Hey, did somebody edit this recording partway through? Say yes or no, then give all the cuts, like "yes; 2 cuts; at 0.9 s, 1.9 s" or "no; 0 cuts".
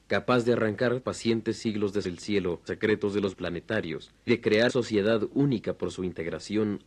yes; 6 cuts; at 1.0 s, 2.0 s, 2.7 s, 3.3 s, 4.3 s, 4.7 s